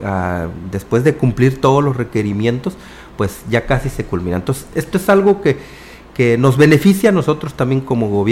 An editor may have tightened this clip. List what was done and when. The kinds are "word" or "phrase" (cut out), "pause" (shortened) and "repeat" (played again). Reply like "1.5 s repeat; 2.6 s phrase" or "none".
none